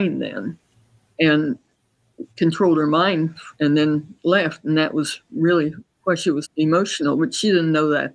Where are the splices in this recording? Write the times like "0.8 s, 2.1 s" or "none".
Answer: 2.3 s, 3.5 s, 6.4 s